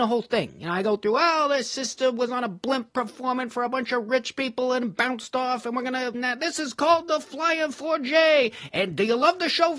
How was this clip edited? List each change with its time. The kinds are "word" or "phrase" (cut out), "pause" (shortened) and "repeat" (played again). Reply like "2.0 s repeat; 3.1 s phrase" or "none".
6.1 s word